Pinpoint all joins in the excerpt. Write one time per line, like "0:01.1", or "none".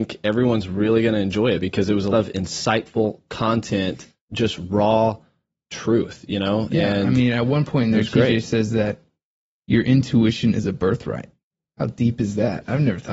0:02.1